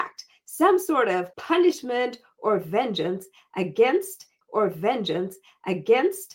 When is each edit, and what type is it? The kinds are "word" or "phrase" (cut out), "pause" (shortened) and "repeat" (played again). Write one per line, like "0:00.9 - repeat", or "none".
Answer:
0:01.3 - pause
0:04.4 - repeat